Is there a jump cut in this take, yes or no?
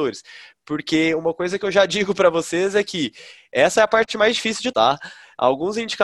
yes